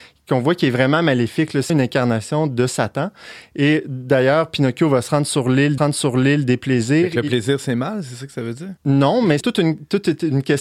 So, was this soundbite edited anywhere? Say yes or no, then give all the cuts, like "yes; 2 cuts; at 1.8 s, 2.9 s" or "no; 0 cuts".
yes; 4 cuts; at 1.7 s, 5.8 s, 8.8 s, 9.4 s